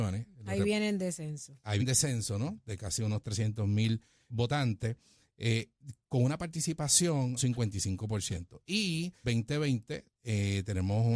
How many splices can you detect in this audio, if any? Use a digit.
4